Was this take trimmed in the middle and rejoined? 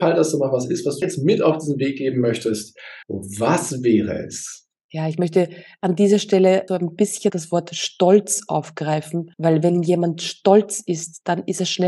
yes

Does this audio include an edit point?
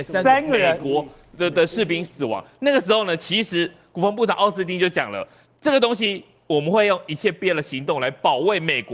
no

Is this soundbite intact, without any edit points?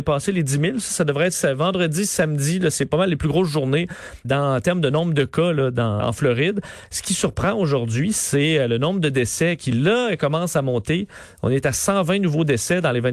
no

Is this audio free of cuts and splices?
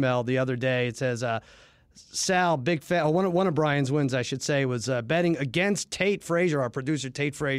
yes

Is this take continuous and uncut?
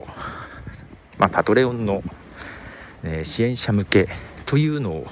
no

